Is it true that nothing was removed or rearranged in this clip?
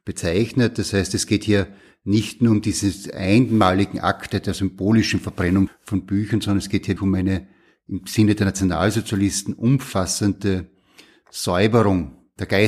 no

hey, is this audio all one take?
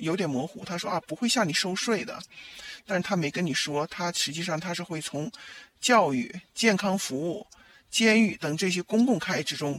yes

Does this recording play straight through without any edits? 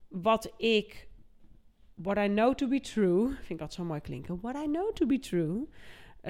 yes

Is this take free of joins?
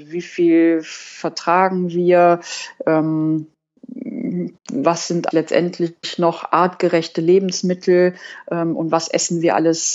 no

